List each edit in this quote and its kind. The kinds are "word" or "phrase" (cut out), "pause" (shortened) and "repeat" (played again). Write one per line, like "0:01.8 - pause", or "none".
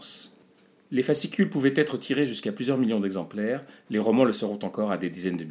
none

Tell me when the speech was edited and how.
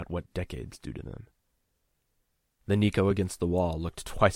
none

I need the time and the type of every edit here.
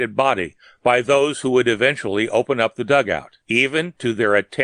0:03.4 - pause

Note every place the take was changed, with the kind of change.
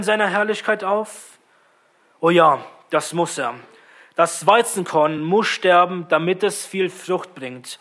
none

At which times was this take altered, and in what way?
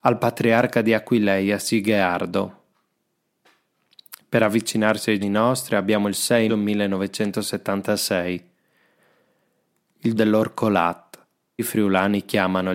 0:05.2 - word
0:06.5 - word
0:10.2 - word
0:11.6 - word

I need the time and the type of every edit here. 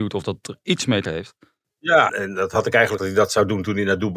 0:01.1 - word
0:02.1 - word
0:03.0 - word

